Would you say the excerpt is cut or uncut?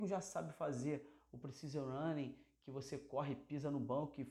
uncut